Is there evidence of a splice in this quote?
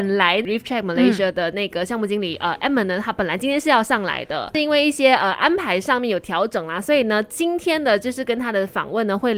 no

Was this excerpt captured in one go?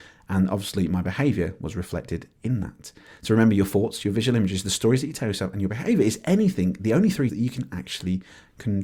no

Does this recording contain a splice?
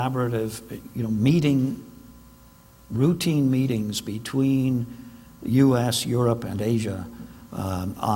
no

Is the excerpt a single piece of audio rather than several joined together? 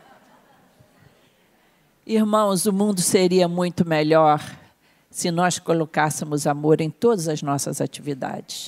yes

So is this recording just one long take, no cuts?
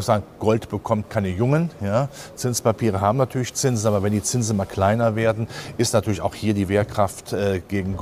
yes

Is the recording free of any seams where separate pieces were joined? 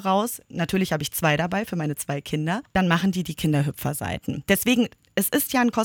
yes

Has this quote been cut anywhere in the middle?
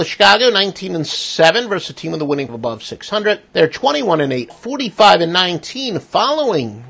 yes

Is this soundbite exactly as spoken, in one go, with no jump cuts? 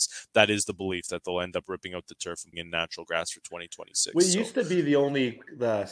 no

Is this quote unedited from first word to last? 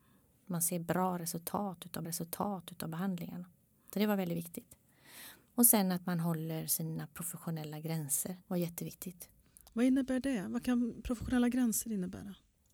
no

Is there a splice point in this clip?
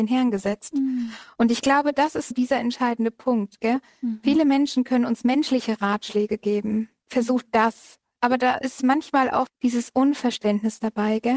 yes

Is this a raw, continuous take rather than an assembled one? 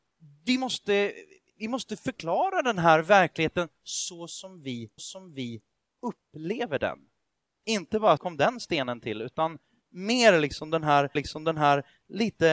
no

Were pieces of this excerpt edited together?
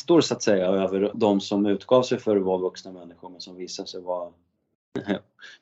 yes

